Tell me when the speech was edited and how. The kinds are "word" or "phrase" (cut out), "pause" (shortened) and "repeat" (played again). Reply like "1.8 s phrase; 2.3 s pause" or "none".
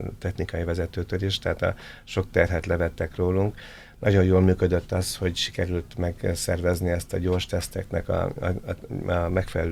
none